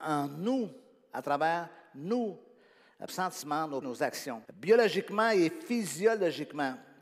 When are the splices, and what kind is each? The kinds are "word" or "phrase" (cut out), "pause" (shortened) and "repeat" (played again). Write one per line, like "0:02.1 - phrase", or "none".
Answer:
0:03.1 - phrase
0:03.8 - word
0:04.4 - pause